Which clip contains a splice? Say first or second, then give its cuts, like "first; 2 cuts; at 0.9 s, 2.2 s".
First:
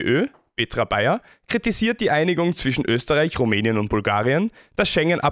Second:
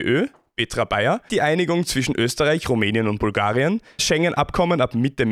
second; 2 cuts; at 1.3 s, 4.0 s